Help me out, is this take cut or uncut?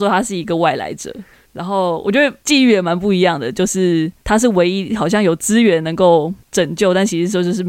cut